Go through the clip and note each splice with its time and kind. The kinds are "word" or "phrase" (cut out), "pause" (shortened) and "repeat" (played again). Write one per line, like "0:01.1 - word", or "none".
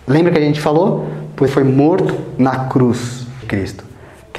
0:01.5 - word
0:03.4 - word